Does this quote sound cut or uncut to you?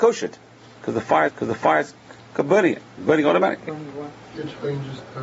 cut